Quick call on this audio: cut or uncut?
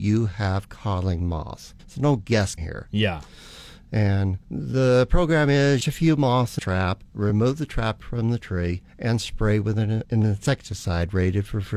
cut